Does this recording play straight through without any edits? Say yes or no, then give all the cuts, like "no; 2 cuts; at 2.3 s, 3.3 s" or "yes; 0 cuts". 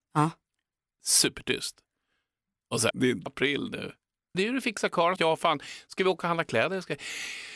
no; 4 cuts; at 2.9 s, 3.3 s, 4.3 s, 5.2 s